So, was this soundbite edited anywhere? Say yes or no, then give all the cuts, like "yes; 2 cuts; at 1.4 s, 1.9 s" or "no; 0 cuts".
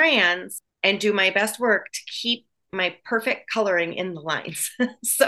no; 0 cuts